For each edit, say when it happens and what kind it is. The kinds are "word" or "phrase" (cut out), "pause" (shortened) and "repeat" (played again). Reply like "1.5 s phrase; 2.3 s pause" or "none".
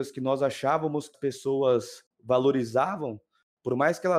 1.1 s word